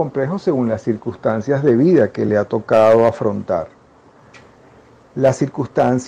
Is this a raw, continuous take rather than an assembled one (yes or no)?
yes